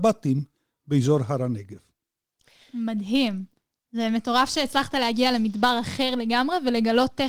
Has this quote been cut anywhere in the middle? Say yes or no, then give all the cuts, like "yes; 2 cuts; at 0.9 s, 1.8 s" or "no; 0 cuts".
no; 0 cuts